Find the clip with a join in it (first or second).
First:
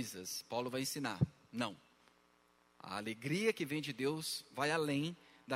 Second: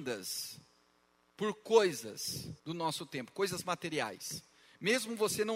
second